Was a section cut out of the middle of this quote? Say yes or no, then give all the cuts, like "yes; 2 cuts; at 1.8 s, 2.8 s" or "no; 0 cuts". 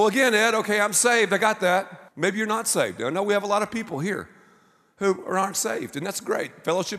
yes; 1 cut; at 2.1 s